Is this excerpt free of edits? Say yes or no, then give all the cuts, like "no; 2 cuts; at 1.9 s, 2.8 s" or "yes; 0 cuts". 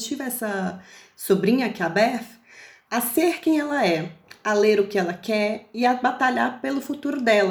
no; 1 cut; at 2.9 s